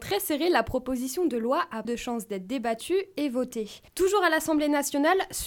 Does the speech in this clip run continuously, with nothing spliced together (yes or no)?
no